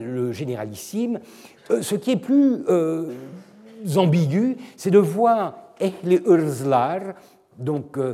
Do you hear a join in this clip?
no; 0 cuts

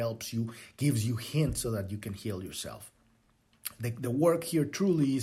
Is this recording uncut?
yes; 0 cuts

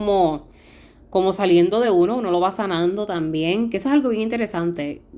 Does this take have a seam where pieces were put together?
no; 0 cuts

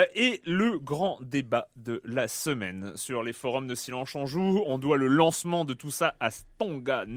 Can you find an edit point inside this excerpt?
no; 0 cuts

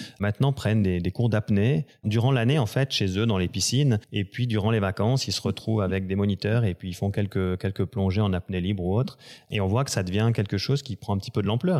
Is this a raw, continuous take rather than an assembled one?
no; 1 cut; at 4.0 s

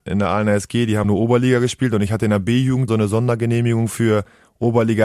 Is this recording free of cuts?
no; 2 cuts; at 1.0 s, 2.9 s

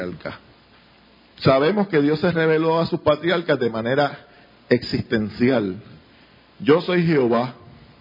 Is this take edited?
no; 0 cuts

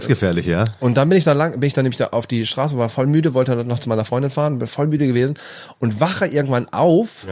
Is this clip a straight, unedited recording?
yes; 0 cuts

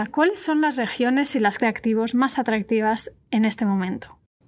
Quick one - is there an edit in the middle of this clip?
yes; 1 cut; at 1.6 s

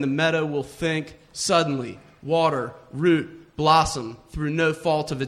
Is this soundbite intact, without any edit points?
yes; 0 cuts

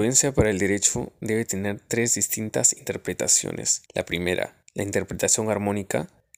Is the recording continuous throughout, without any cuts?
no; 2 cuts; at 3.9 s, 4.7 s

